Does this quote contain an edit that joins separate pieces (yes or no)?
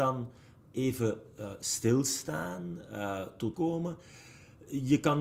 yes